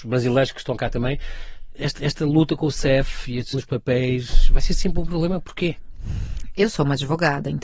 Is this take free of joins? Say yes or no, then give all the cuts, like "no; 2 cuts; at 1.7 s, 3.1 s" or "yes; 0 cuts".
no; 2 cuts; at 2.0 s, 3.5 s